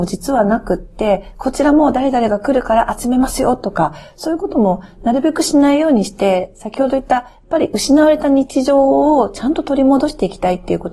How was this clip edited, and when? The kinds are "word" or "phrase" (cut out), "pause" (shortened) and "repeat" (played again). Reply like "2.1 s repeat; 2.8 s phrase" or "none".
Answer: none